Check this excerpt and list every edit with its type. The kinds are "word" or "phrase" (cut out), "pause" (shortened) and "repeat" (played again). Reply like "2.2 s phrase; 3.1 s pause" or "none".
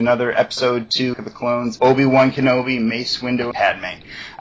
1.1 s word; 1.8 s word; 3.5 s word